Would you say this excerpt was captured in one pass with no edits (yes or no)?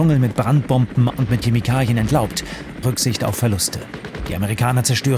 no